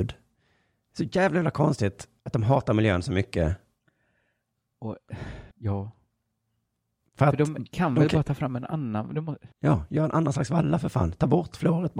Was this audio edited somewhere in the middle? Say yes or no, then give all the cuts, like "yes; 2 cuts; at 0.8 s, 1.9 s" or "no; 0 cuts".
yes; 3 cuts; at 2.2 s, 5.5 s, 9.5 s